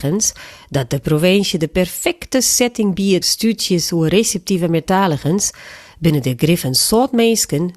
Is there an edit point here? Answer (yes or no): yes